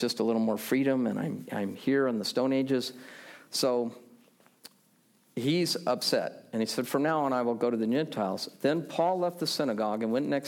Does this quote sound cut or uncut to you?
uncut